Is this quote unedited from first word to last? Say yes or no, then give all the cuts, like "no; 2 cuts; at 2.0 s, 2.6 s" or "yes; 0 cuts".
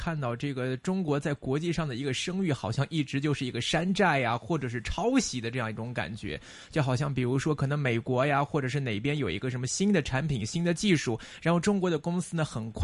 yes; 0 cuts